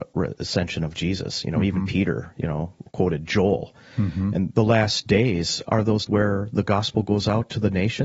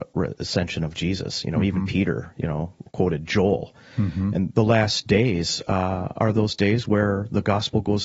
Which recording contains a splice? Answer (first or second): first